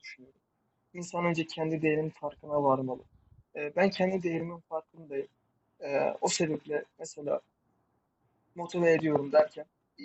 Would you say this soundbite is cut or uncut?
uncut